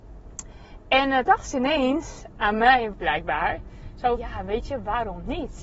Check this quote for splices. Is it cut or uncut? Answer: cut